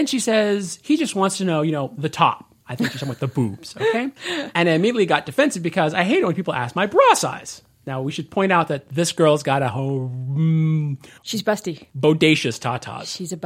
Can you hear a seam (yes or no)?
yes